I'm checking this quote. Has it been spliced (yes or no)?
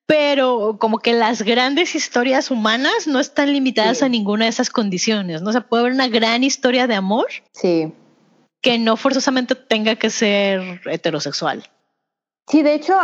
yes